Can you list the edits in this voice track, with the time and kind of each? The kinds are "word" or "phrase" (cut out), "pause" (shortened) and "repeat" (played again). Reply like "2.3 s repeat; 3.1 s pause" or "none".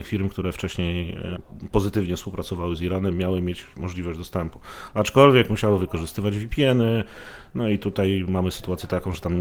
none